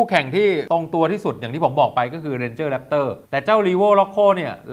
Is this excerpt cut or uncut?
cut